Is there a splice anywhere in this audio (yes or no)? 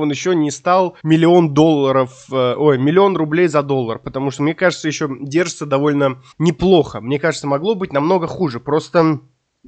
yes